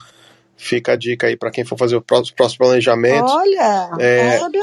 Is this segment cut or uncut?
uncut